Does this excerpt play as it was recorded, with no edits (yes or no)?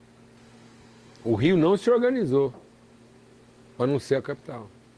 yes